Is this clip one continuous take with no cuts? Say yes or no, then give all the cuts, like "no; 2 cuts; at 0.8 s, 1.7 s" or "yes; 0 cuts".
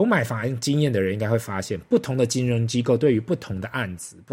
yes; 0 cuts